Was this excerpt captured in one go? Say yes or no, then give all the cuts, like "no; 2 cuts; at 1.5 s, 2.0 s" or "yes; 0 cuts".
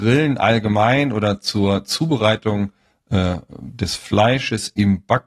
yes; 0 cuts